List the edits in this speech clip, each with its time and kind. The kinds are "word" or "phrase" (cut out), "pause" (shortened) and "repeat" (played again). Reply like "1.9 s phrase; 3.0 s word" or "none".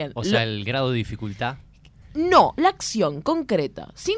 none

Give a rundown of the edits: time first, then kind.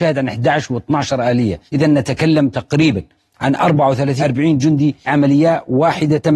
1.7 s pause; 4.2 s word; 5.1 s word

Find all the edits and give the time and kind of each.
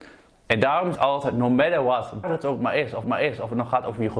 0.9 s word; 2.2 s word; 3.0 s repeat

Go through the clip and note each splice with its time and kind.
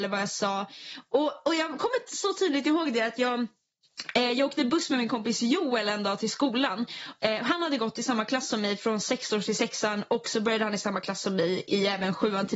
none

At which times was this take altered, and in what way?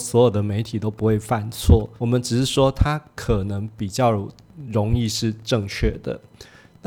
2.0 s pause

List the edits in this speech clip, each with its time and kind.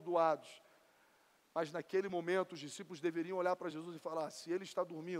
none

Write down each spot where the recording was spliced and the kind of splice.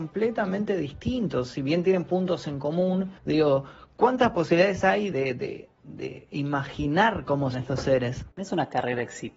3.2 s pause; 5.1 s word; 7.5 s word; 8.3 s pause

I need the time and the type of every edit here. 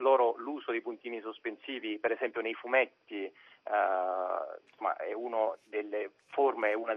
none

